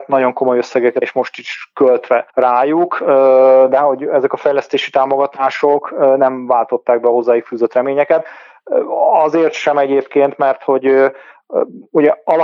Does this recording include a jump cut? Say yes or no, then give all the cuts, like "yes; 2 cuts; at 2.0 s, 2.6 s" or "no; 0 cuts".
yes; 2 cuts; at 1.0 s, 2.3 s